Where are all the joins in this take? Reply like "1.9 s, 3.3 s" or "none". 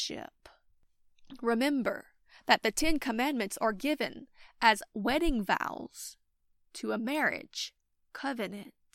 none